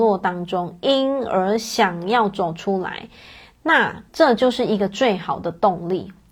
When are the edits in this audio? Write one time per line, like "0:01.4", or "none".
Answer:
0:04.1